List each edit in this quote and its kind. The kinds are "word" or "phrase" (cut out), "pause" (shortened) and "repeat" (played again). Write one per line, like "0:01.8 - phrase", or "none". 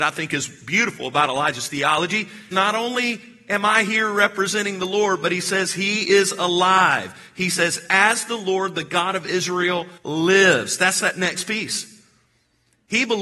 0:02.5 - phrase
0:10.0 - pause